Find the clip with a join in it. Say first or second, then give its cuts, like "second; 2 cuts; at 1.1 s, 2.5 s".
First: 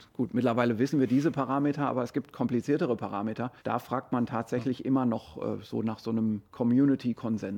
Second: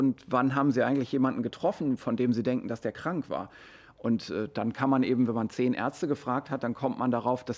first; 2 cuts; at 3.6 s, 6.4 s